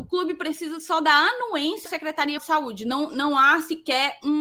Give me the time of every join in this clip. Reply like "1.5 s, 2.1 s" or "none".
1.9 s, 2.4 s